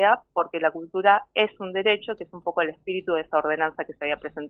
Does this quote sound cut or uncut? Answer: uncut